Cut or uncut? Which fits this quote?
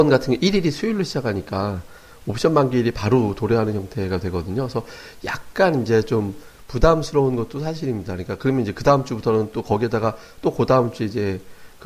uncut